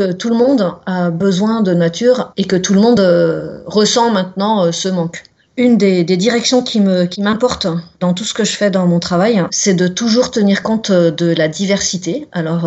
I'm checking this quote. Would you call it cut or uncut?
uncut